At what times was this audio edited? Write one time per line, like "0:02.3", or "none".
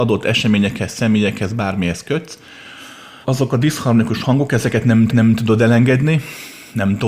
0:03.2
0:05.1